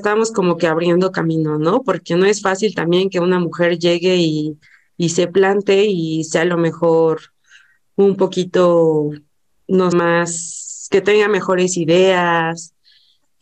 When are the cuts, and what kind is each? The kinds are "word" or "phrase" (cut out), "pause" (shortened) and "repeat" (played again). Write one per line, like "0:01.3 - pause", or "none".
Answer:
0:09.9 - word